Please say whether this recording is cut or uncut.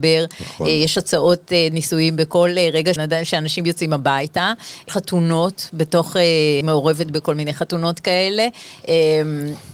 cut